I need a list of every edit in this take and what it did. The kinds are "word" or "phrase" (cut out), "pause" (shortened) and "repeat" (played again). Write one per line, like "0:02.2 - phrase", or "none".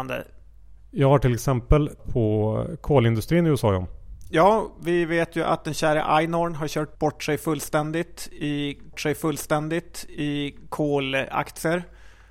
0:02.0 - word
0:06.9 - word
0:08.9 - repeat